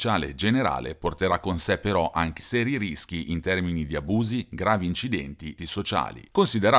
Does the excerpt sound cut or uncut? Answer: cut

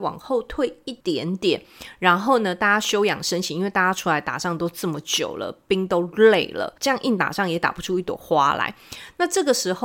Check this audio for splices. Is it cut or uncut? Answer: cut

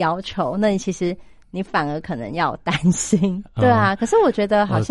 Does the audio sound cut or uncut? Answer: uncut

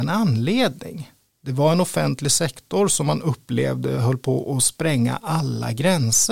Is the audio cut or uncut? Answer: uncut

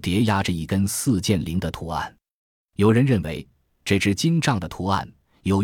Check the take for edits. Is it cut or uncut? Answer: uncut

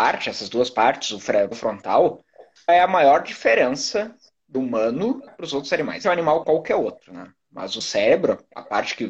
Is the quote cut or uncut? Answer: cut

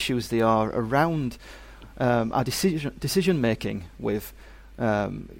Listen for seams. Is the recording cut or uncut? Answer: uncut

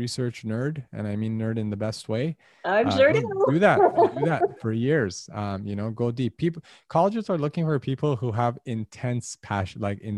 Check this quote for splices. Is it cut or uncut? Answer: cut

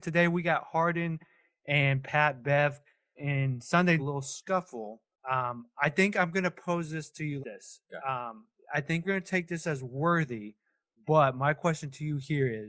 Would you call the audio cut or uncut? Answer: cut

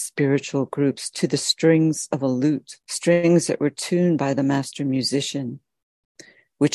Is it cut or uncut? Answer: cut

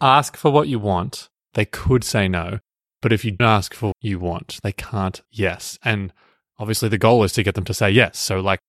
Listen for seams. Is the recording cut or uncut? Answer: cut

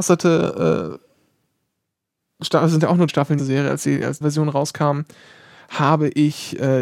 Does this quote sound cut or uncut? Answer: cut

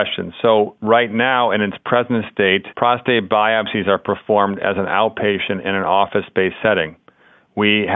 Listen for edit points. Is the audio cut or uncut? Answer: uncut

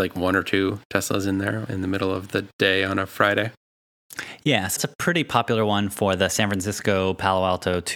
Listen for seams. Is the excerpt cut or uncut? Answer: cut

